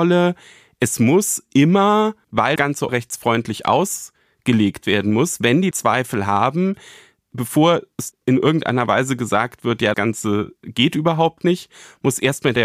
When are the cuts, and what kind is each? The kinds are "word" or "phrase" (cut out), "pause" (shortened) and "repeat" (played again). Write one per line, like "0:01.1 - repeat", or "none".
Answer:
0:02.6 - word
0:02.9 - word
0:05.7 - word
0:08.1 - word
0:09.9 - word